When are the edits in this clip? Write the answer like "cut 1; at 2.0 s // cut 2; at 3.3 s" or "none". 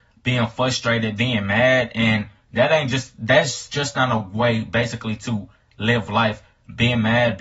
none